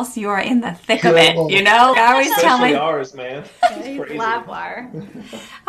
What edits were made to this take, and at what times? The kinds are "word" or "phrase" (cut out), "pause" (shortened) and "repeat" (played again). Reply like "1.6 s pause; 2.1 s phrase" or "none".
1.9 s word